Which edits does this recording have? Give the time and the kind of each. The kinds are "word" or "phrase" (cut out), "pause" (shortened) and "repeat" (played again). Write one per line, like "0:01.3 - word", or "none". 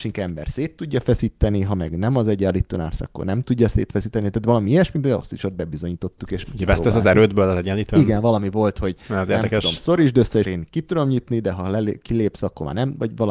0:10.4 - word